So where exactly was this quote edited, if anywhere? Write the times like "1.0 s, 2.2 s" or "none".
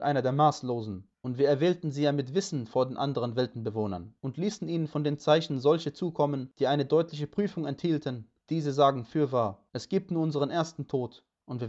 1.1 s, 4.2 s, 8.4 s, 9.7 s